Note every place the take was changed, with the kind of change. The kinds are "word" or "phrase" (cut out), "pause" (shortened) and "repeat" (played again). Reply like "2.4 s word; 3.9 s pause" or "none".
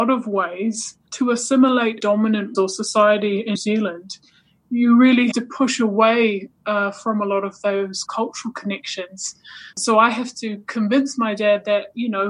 1.1 s pause; 2.0 s phrase; 2.5 s phrase; 3.5 s word; 5.3 s word; 8.1 s phrase; 9.7 s pause

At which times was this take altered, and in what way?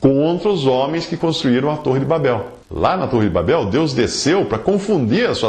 2.6 s pause

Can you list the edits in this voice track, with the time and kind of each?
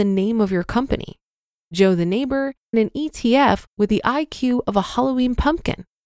2.7 s word

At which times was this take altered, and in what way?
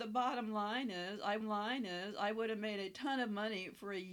1.4 s repeat

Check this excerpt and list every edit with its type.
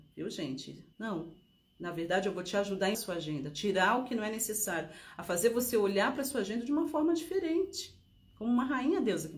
0.9 s pause; 2.9 s phrase

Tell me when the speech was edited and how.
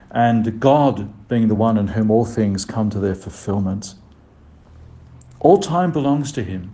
none

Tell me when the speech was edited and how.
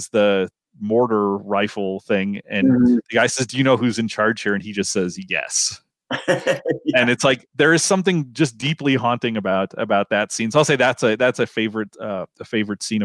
none

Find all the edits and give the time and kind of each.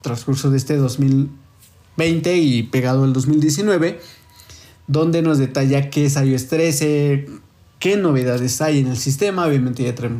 none

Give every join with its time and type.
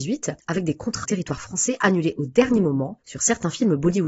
1.0 s phrase

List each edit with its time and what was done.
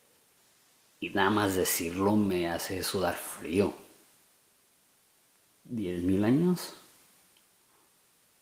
none

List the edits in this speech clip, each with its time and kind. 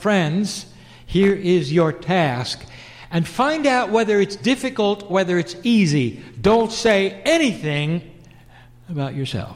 5.1 s word

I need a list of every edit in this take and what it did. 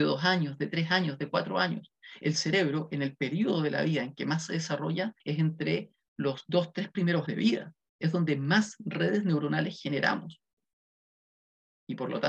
5.2 s pause; 7.3 s word

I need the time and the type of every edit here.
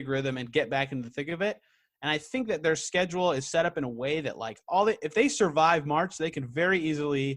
none

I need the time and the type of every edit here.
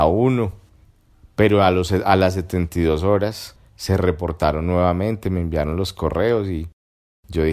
3.7 s pause

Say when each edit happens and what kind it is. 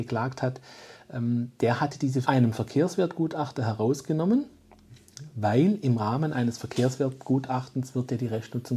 2.2 s phrase

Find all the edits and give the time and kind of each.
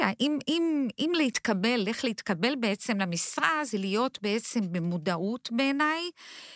none

